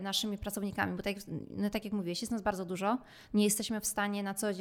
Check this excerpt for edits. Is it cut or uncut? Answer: uncut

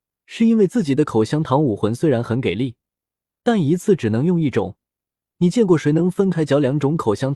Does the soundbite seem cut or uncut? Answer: uncut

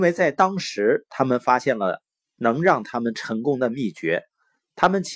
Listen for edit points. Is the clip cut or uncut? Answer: uncut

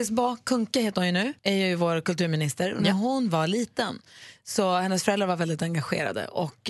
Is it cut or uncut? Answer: cut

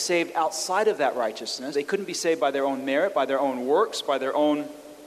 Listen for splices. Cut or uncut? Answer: cut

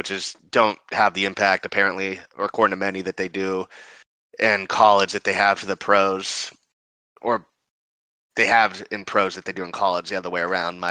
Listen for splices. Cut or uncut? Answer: uncut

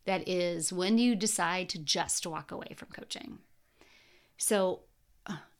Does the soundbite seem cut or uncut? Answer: uncut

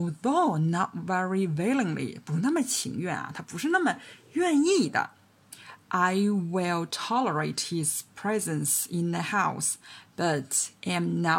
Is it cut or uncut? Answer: uncut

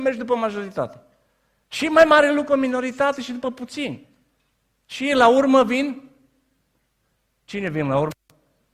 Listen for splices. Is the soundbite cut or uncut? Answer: cut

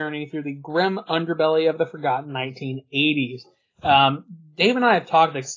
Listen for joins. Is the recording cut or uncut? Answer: uncut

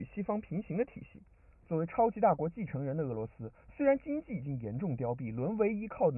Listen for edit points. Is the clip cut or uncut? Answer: uncut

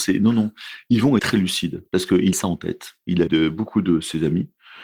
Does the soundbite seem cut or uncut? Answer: cut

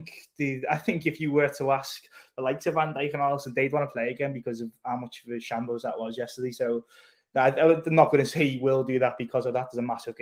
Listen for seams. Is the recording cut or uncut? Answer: uncut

